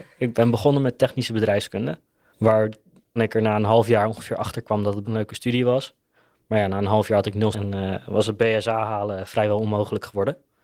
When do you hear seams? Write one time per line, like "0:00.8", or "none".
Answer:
0:03.2
0:05.0
0:07.5